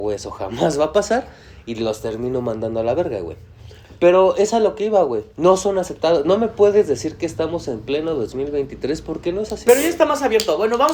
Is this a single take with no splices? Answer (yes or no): no